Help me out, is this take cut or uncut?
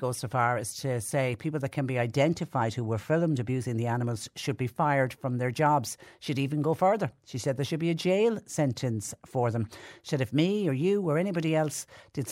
uncut